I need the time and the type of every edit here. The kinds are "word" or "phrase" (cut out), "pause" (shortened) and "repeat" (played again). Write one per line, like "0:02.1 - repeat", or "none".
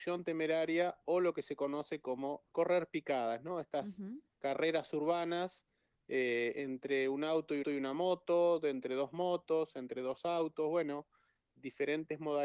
0:02.5 - pause
0:04.3 - pause
0:07.6 - repeat

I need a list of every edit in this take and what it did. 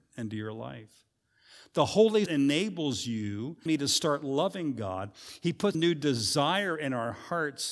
0:02.3 - word
0:03.7 - word
0:05.7 - word

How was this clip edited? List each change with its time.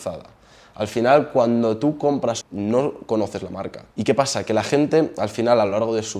0:02.4 - word
0:03.9 - pause

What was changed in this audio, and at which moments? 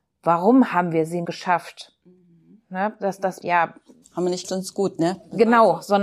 0:01.2 - word
0:03.4 - phrase
0:04.0 - pause
0:04.4 - word

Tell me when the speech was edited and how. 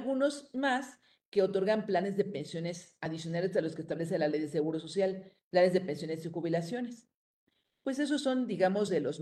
none

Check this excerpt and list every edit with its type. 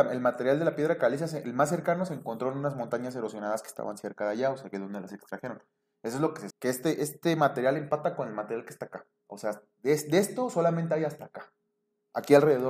0:06.5 - word

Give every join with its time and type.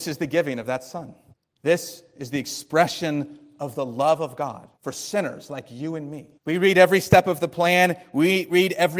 0:01.3 - pause
0:04.8 - pause
0:06.4 - pause

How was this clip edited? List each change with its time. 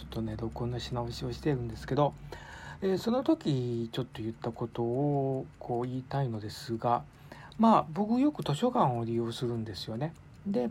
none

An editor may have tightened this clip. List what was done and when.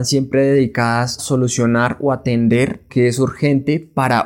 0:01.2 - word
0:02.9 - word

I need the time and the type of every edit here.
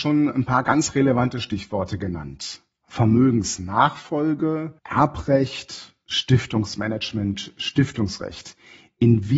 0:04.8 - pause

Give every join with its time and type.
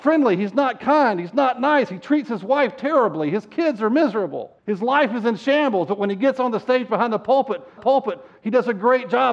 0:04.6 - pause
0:07.8 - repeat

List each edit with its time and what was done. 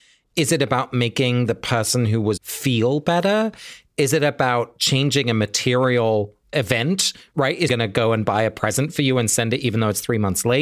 0:02.4 - word
0:06.4 - pause
0:07.7 - word

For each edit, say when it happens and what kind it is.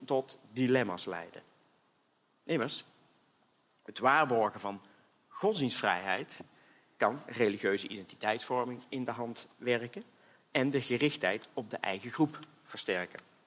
none

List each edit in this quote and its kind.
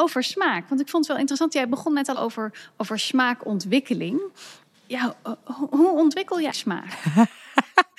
0:02.1 - word
0:06.5 - word

